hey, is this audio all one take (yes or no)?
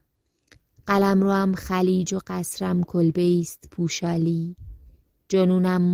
yes